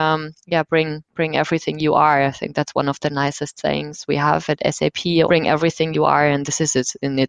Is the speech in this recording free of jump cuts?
no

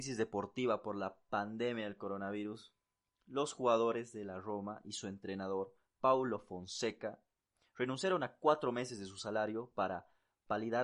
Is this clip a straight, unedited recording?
yes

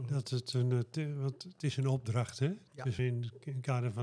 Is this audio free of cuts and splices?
no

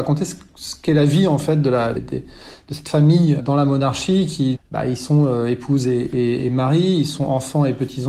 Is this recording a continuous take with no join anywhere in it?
no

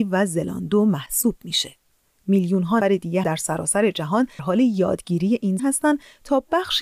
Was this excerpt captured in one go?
no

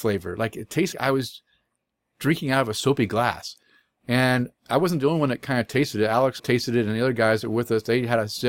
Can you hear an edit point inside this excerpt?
yes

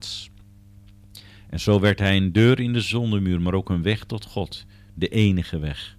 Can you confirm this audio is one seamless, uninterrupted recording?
yes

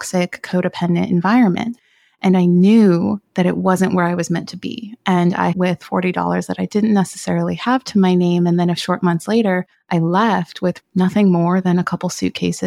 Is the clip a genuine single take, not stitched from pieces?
no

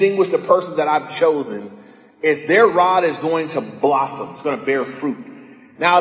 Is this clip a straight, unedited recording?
yes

